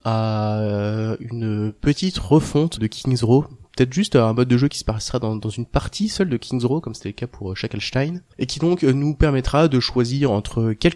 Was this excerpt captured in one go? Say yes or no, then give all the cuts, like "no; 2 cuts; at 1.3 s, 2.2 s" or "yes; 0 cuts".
no; 1 cut; at 2.8 s